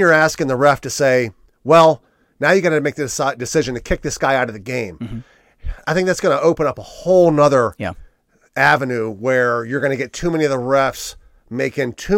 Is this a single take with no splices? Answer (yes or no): yes